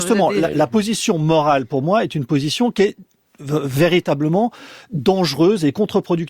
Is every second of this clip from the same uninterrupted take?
yes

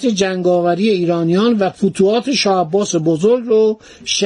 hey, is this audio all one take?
yes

